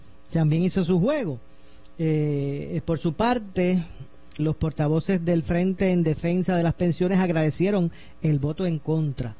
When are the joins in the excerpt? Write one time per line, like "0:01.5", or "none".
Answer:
0:04.4